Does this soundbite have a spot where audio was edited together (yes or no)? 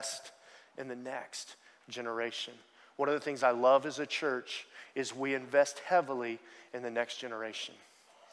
no